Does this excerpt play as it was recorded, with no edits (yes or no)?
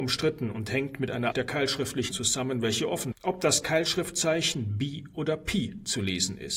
no